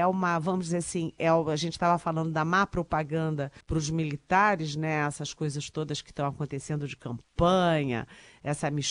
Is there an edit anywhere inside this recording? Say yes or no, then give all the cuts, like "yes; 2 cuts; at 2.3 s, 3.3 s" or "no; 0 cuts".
yes; 1 cut; at 3.6 s